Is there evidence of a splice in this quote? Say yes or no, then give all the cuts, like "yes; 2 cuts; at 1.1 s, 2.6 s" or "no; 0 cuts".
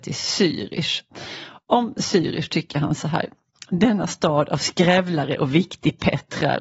no; 0 cuts